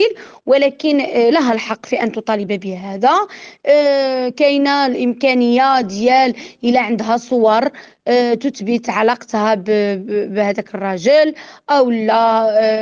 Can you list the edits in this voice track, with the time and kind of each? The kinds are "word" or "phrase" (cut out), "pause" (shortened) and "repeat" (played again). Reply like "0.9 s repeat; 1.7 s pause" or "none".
none